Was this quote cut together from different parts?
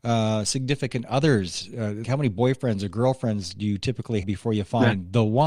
yes; 2 cuts; at 2.0 s, 4.2 s

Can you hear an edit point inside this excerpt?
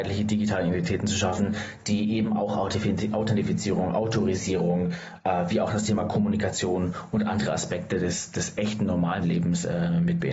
yes; 1 cut; at 9.2 s

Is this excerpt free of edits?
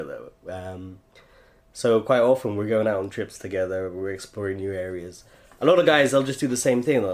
yes; 0 cuts

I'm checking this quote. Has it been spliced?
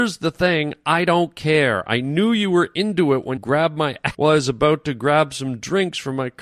yes; 2 cuts; at 3.4 s, 4.1 s

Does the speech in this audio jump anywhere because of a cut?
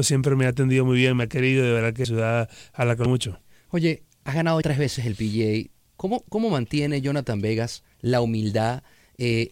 yes; 4 cuts; at 2.0 s, 3.1 s, 4.6 s, 7.9 s

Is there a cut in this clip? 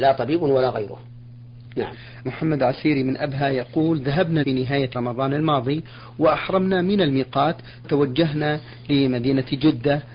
yes; 4 cuts; at 2.3 s, 4.4 s, 4.9 s, 7.8 s

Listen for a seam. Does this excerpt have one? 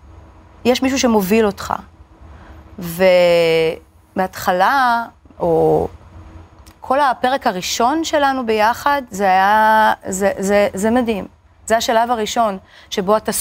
no; 0 cuts

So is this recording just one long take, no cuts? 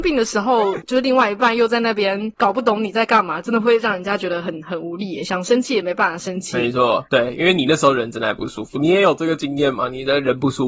yes; 0 cuts

